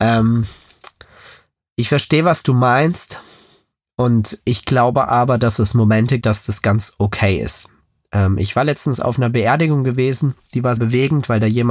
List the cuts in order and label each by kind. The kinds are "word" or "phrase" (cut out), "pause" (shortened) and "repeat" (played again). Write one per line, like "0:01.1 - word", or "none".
0:06.2 - word
0:10.8 - word

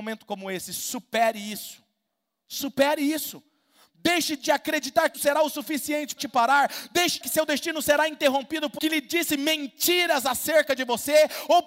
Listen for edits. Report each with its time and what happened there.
0:05.1 - word
0:06.2 - word
0:07.2 - word
0:08.8 - word

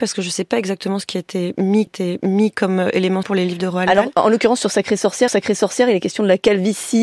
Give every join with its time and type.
0:01.9 - repeat
0:03.2 - phrase
0:05.3 - repeat

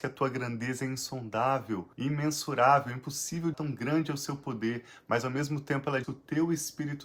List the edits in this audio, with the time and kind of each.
0:01.9 - pause
0:03.5 - phrase
0:06.0 - word

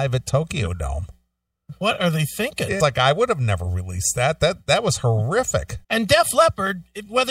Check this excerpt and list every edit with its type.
0:02.8 - word
0:05.8 - pause

